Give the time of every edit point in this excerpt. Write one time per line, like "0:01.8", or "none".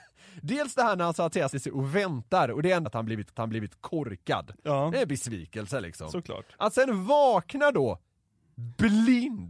0:01.5
0:02.8
0:03.3